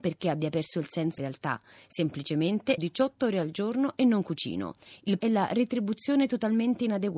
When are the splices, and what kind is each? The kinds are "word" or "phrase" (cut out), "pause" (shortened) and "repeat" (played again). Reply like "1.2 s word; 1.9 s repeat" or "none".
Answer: 1.2 s word; 2.8 s word; 5.2 s word